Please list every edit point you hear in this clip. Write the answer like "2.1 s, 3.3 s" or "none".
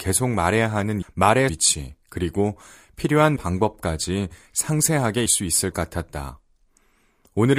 1.0 s, 1.5 s, 3.4 s, 5.3 s, 5.7 s